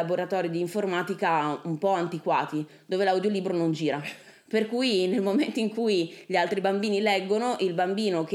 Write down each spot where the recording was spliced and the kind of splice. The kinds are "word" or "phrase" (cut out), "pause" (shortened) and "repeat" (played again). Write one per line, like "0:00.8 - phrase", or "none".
none